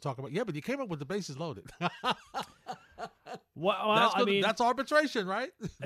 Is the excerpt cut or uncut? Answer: uncut